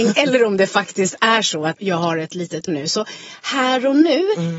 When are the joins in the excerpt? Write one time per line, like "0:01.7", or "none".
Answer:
0:01.8
0:02.7